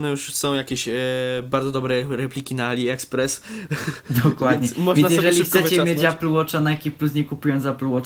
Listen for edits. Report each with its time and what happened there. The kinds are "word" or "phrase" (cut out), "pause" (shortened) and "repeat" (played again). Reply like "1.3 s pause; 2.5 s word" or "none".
none